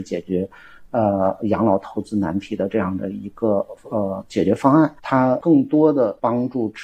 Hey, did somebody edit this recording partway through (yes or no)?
yes